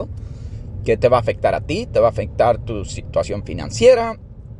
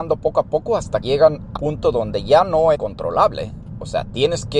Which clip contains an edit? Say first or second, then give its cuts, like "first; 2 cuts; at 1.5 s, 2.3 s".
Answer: second; 3 cuts; at 1.0 s, 1.6 s, 2.7 s